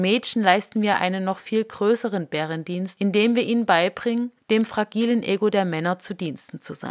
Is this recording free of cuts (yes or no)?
yes